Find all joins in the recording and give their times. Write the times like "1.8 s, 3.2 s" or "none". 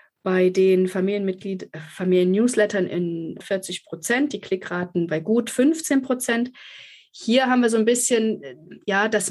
3.4 s